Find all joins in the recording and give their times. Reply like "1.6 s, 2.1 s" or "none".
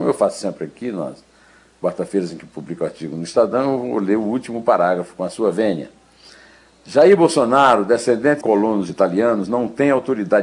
8.4 s

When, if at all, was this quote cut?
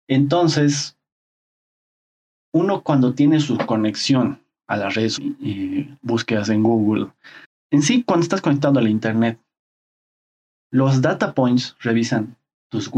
5.2 s, 7.4 s

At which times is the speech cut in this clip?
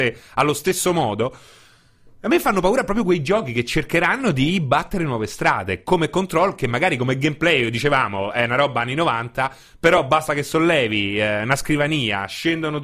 none

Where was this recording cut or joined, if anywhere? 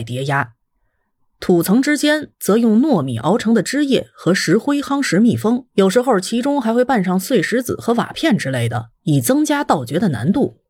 5.7 s, 8.9 s

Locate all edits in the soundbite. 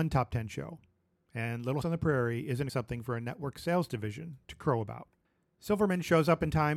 1.8 s, 2.7 s, 5.2 s

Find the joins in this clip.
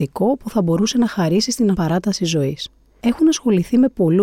1.7 s

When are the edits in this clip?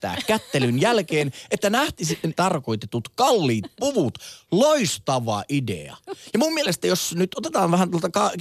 2.3 s

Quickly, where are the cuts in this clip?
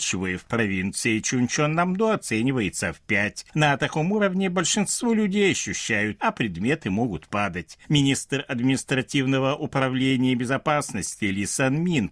6.2 s

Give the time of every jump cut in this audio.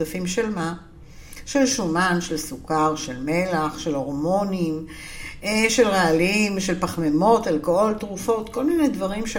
none

